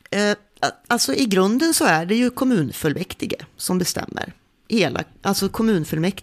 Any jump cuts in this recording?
no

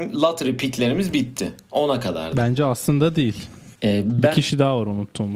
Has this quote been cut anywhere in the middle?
yes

